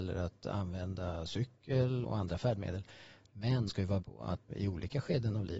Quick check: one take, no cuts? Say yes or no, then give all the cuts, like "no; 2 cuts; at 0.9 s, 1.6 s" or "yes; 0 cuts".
no; 4 cuts; at 2.0 s, 3.7 s, 4.0 s, 4.5 s